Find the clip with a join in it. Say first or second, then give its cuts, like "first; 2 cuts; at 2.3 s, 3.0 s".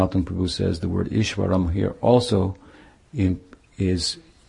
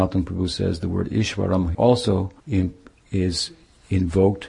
second; 2 cuts; at 1.7 s, 2.4 s